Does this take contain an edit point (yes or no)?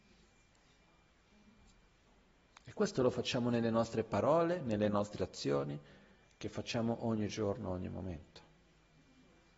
no